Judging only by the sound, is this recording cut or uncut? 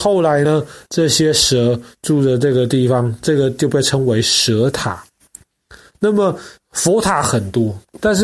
cut